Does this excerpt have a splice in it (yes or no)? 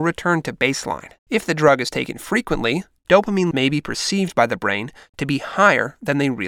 yes